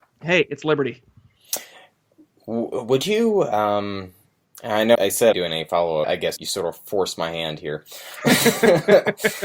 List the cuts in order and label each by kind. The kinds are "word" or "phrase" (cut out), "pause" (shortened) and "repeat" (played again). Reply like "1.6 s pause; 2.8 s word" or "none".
4.4 s pause; 4.9 s word; 5.3 s phrase; 6.0 s phrase; 6.4 s word